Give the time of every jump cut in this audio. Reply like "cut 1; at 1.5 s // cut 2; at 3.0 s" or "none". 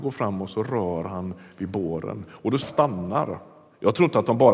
cut 1; at 2.6 s

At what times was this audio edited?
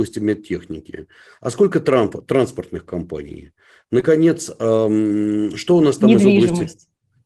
none

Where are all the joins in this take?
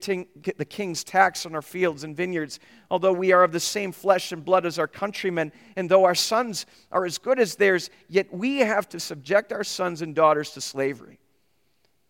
none

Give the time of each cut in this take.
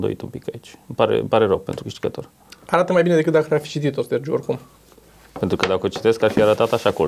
none

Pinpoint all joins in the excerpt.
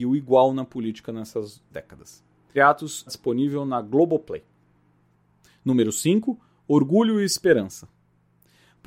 cut 1; at 1.7 s // cut 2; at 2.5 s // cut 3; at 3.1 s

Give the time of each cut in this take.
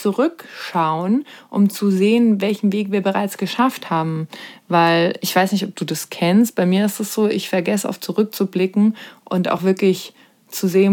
none

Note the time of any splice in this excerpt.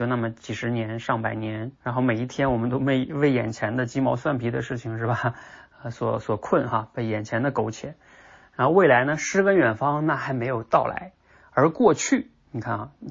cut 1; at 1.8 s

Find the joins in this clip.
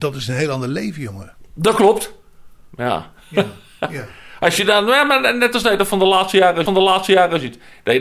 cut 1; at 6.7 s

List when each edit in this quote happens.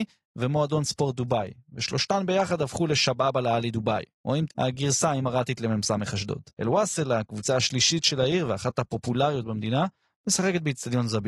cut 1; at 4.1 s // cut 2; at 4.5 s // cut 3; at 6.5 s

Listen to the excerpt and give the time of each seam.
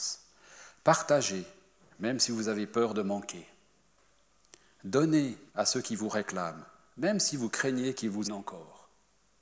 cut 1; at 5.5 s // cut 2; at 8.2 s

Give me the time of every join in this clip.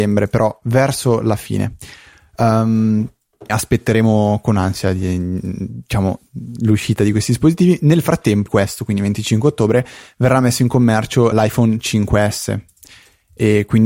cut 1; at 3.5 s // cut 2; at 8.5 s // cut 3; at 11.3 s

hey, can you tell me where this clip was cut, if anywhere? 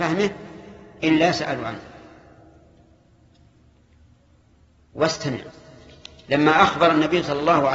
none

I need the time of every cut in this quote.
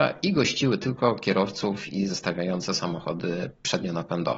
cut 1; at 2.1 s

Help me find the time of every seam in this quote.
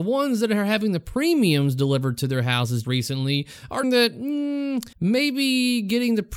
cut 1; at 2.8 s // cut 2; at 3.8 s // cut 3; at 4.9 s

